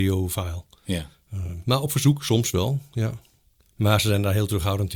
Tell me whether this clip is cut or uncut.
uncut